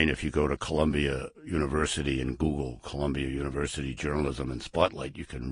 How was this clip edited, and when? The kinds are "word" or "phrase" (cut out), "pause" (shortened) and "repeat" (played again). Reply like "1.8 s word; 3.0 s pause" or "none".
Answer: 1.4 s pause